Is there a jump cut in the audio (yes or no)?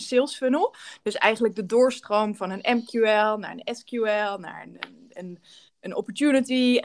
no